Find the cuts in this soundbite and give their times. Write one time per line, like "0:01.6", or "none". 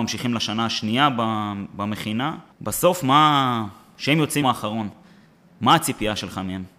0:02.5
0:04.4